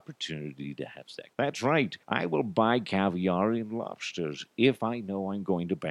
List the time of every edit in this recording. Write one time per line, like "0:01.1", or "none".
0:01.3
0:02.0